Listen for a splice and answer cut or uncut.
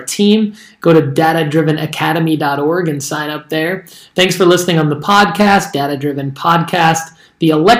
uncut